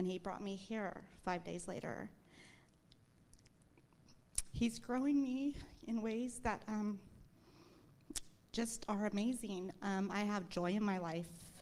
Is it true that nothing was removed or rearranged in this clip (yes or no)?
no